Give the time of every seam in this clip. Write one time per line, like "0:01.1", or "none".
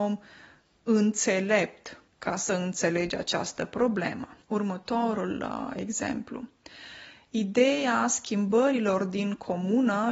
0:02.1
0:04.4